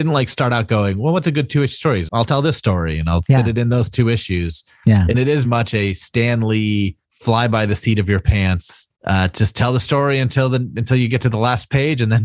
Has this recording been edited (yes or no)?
yes